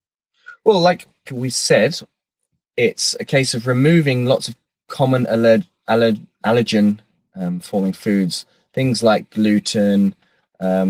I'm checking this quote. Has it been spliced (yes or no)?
yes